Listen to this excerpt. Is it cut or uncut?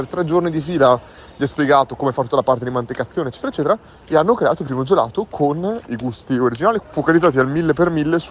cut